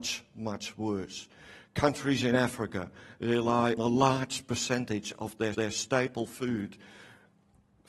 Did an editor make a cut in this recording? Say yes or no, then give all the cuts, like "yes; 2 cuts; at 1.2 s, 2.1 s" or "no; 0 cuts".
yes; 2 cuts; at 3.8 s, 5.5 s